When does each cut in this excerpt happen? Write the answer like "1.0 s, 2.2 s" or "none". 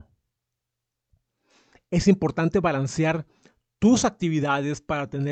none